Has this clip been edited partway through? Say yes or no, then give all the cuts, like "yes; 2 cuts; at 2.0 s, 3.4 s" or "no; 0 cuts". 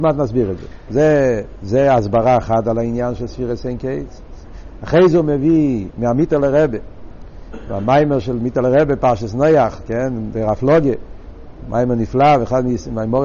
no; 0 cuts